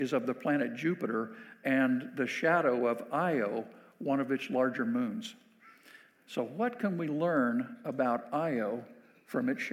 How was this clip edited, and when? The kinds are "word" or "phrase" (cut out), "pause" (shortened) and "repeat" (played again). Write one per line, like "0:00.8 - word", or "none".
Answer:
none